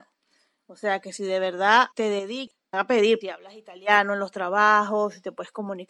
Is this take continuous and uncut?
no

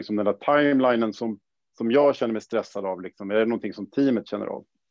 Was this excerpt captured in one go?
yes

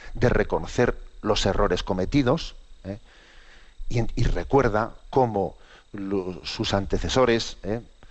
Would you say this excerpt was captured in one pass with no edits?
no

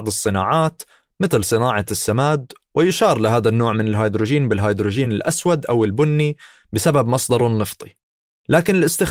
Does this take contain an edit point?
no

